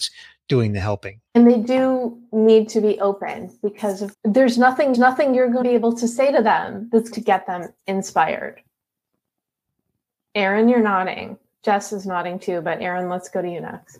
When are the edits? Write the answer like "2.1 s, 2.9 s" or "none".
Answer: 1.3 s, 4.1 s, 4.9 s, 5.6 s, 7.1 s, 7.8 s